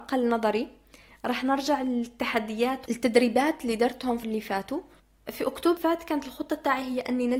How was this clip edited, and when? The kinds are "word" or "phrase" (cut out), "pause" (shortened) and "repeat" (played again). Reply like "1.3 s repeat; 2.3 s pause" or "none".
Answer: 2.9 s word; 4.2 s word; 5.8 s word